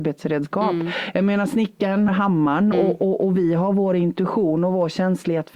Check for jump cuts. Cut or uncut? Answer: cut